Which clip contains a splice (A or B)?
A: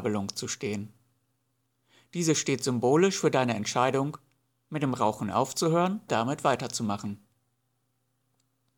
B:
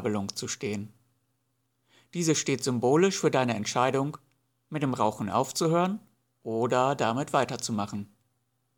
A